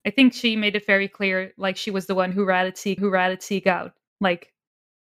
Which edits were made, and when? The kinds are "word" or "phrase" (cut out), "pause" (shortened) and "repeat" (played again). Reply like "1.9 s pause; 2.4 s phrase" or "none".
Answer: 3.0 s repeat